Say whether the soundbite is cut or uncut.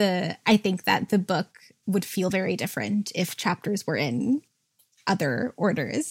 uncut